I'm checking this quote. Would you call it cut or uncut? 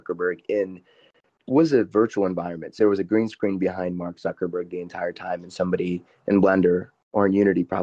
cut